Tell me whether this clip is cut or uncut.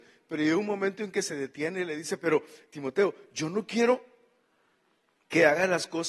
uncut